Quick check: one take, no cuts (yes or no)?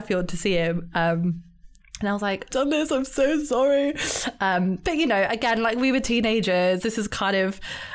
no